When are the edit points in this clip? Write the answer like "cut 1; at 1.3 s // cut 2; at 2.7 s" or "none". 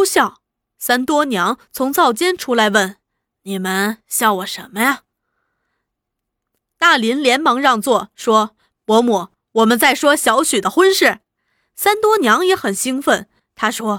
none